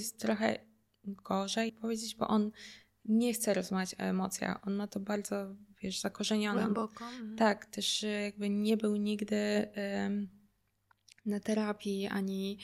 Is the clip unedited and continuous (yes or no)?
no